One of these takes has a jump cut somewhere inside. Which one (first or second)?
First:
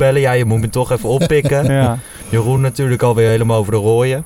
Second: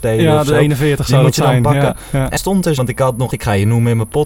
second